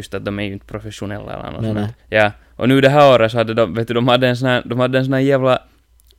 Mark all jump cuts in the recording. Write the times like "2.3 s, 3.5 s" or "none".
2.0 s